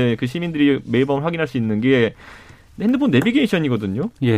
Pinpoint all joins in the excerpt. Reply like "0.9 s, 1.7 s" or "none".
none